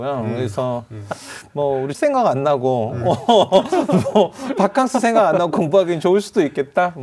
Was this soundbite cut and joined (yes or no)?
yes